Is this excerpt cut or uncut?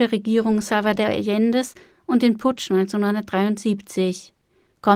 uncut